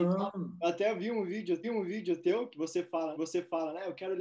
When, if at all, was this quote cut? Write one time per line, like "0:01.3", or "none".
0:01.6
0:03.1